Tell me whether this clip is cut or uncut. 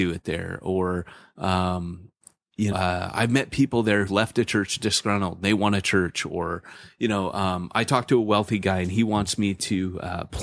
cut